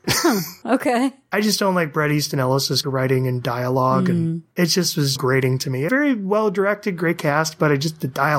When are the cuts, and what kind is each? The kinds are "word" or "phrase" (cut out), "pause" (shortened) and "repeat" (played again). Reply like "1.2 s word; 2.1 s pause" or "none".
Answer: 2.8 s word; 5.2 s word; 5.9 s word

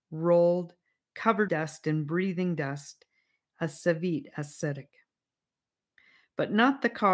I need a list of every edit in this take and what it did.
1.5 s word

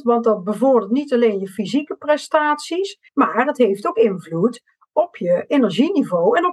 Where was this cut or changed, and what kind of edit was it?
3.1 s pause

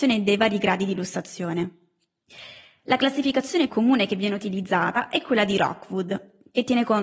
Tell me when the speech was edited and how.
3.7 s word

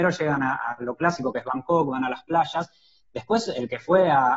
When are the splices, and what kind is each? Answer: none

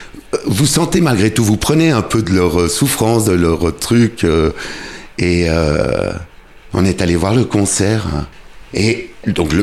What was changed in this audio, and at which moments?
none

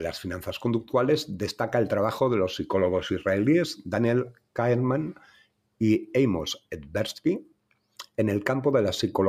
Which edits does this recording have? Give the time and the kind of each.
none

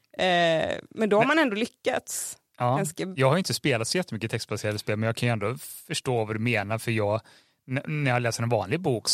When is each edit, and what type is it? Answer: 5.8 s pause

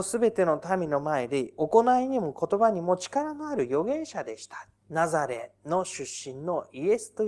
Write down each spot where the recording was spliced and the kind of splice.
4.8 s pause

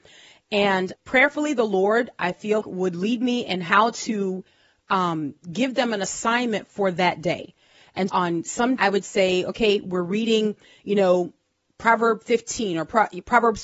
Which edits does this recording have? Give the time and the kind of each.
1.0 s word; 2.6 s word; 8.1 s word; 8.8 s word

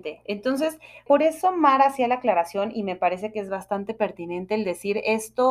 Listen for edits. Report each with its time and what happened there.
1.1 s word

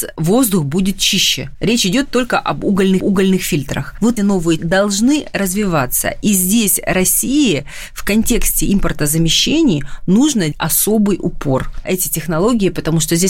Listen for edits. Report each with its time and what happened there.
3.0 s repeat; 4.2 s word; 4.6 s word; 10.5 s word; 11.8 s word

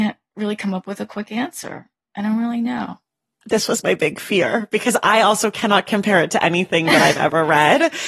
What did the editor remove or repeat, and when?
none

